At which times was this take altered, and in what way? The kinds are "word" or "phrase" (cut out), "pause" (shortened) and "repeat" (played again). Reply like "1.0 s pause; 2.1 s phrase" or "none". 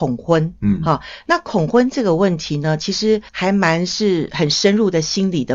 3.3 s pause

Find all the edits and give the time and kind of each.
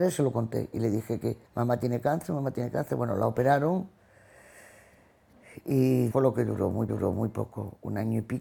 1.5 s pause; 6.1 s word; 6.9 s repeat

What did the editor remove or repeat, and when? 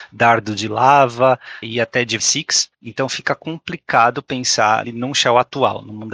1.6 s word; 2.2 s word; 4.8 s word

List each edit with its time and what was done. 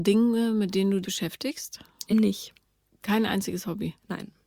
1.0 s word; 2.1 s word

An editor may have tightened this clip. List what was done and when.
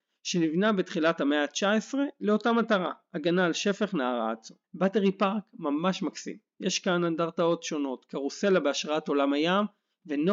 4.6 s pause

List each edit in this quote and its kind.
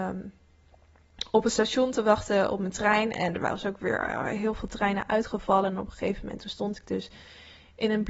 none

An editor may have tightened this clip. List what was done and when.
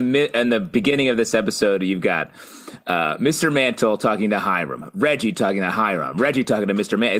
none

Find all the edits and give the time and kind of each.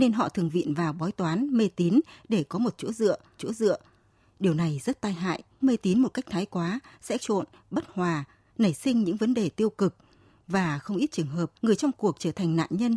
3.4 s repeat; 5.6 s word; 7.2 s phrase; 11.6 s pause

